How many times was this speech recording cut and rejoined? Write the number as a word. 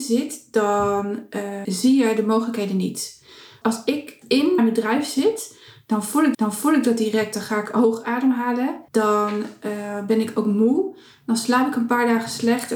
six